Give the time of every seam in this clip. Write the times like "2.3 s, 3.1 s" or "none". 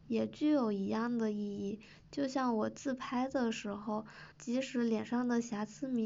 4.3 s